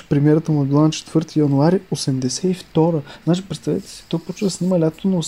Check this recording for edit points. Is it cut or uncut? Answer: uncut